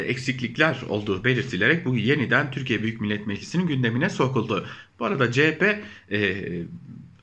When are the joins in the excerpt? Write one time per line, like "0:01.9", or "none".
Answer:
none